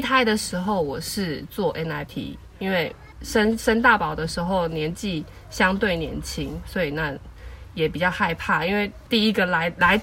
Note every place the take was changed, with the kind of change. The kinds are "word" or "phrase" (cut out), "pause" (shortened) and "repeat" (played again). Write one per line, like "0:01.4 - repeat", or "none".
0:02.1 - word